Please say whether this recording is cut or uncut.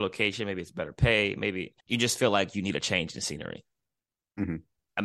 cut